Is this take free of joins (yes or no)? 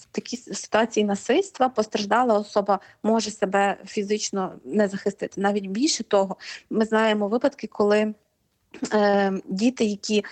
yes